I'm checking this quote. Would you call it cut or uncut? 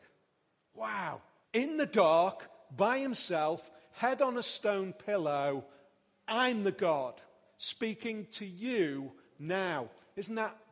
cut